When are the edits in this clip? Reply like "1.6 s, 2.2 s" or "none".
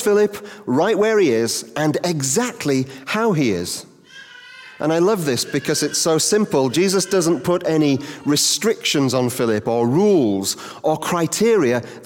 none

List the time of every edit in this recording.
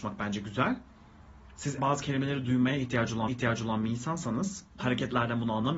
1.8 s, 3.3 s, 4.8 s

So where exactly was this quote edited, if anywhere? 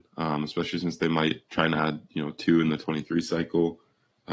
none

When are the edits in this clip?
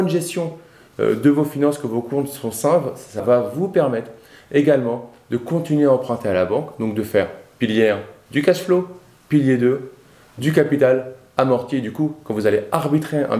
3.2 s

